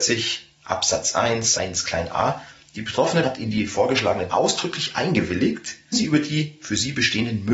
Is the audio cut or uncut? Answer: cut